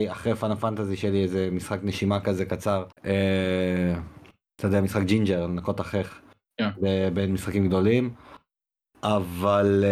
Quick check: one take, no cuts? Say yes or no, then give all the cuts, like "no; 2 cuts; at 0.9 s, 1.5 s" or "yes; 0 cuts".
no; 1 cut; at 2.9 s